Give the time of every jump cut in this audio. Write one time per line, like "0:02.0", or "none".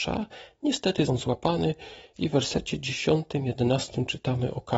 0:01.1